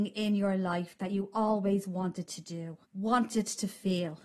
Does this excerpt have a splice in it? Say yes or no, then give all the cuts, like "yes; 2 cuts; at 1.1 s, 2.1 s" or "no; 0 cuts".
yes; 1 cut; at 2.9 s